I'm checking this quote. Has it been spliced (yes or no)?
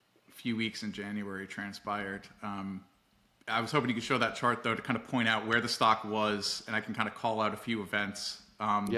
no